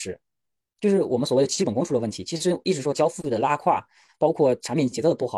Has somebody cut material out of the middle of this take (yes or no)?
no